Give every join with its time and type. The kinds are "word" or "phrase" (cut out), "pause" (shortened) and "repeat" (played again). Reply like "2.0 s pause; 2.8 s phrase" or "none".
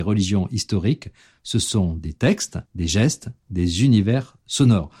2.7 s pause